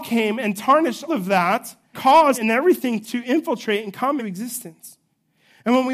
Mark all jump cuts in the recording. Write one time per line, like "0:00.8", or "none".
0:01.1
0:01.9
0:02.3
0:03.0
0:04.2